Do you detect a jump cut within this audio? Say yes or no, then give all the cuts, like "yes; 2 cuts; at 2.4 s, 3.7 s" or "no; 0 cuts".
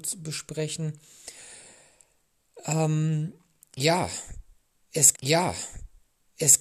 yes; 1 cut; at 5.1 s